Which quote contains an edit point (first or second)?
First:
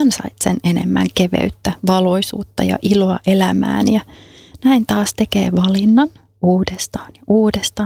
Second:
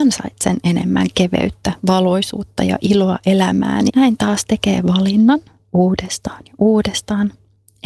second